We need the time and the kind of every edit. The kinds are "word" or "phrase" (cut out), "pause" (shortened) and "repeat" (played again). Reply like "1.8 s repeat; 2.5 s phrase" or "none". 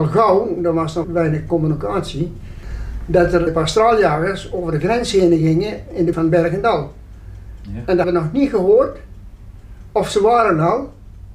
1.0 s word; 3.5 s word; 6.1 s word; 8.0 s word